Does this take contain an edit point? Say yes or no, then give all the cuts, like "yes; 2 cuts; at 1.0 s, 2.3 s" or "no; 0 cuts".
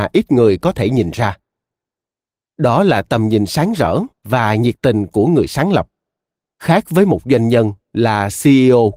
no; 0 cuts